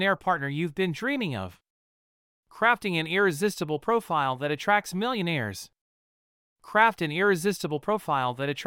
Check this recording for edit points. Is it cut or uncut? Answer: uncut